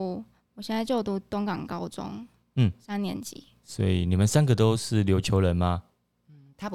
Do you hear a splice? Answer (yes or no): no